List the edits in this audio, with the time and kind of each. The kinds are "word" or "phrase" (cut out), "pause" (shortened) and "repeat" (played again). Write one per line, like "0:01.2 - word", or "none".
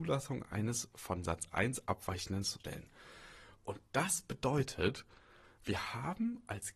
0:02.6 - word